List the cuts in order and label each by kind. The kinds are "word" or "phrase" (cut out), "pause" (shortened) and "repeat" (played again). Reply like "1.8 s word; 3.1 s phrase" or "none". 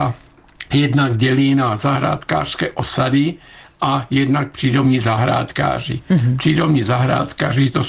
none